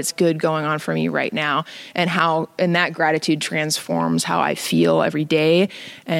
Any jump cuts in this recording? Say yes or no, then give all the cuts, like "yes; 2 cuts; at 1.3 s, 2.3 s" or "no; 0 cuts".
no; 0 cuts